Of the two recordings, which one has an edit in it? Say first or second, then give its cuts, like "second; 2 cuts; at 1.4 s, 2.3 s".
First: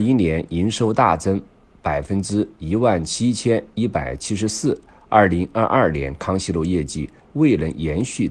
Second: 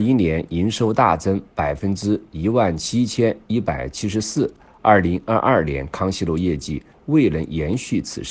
second; 1 cut; at 1.5 s